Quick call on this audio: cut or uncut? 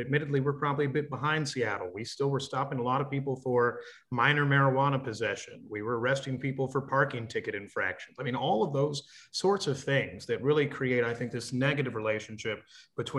uncut